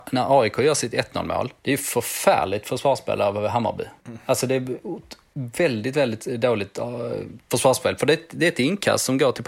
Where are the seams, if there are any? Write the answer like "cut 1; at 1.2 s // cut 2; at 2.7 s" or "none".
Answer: cut 1; at 1.6 s // cut 2; at 4.0 s